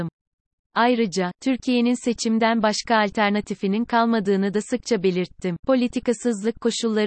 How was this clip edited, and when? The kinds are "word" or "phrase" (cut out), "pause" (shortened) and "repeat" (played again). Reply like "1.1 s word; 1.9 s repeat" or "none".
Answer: 5.6 s pause